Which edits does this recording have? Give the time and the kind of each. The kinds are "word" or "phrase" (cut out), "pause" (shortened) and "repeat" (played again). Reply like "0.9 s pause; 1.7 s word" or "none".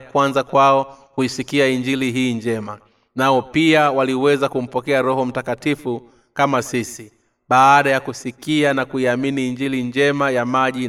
none